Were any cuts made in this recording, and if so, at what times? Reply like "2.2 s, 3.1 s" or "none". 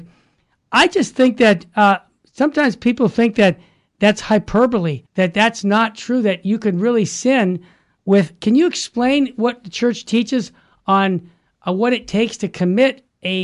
5.1 s